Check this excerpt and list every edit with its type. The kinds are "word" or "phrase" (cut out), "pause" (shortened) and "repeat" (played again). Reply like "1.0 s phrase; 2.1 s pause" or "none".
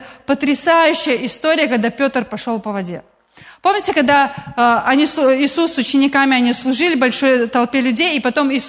none